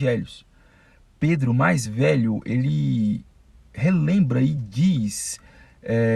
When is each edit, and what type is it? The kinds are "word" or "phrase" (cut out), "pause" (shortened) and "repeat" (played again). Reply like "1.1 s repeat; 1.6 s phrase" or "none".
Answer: none

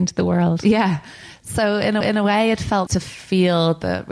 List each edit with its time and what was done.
2.0 s repeat; 2.9 s word

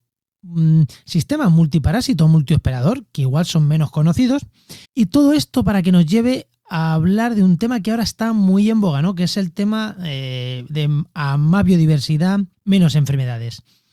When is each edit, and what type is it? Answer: 4.8 s pause; 12.5 s pause

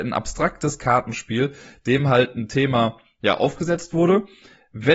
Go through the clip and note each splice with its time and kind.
none

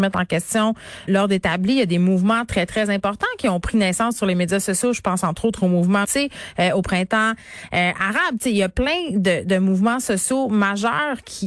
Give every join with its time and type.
1.1 s word; 6.0 s word

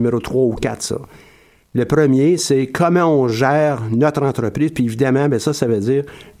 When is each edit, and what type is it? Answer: none

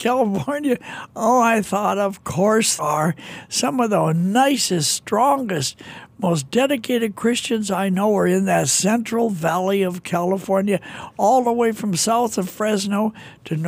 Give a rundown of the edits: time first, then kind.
2.8 s word

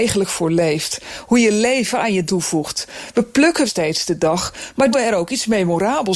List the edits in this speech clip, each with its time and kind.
2.3 s word; 3.7 s word; 4.9 s word

